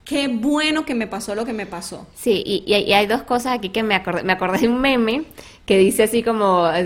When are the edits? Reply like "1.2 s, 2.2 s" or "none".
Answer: none